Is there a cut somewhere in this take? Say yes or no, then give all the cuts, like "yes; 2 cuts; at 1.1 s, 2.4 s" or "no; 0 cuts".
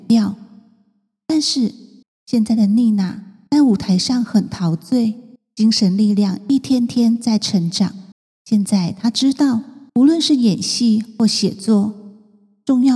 yes; 5 cuts; at 2.0 s, 3.5 s, 5.4 s, 8.1 s, 9.9 s